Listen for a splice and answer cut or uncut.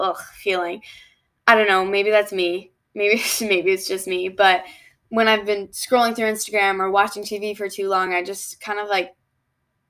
uncut